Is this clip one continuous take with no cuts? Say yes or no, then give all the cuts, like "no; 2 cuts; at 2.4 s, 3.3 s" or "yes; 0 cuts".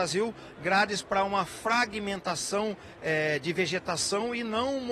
yes; 0 cuts